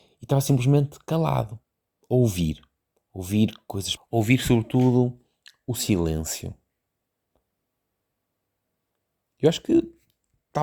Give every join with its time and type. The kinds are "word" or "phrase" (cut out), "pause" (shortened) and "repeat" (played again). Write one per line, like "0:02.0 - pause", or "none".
0:04.0 - word